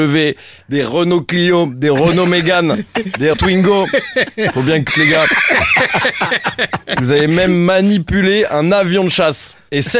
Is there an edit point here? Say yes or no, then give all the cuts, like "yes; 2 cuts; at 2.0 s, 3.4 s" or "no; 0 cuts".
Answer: yes; 2 cuts; at 3.3 s, 4.9 s